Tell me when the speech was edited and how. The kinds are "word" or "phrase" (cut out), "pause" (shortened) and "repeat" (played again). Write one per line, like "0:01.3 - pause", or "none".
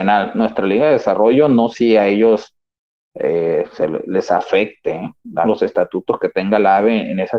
0:01.7 - word
0:05.4 - phrase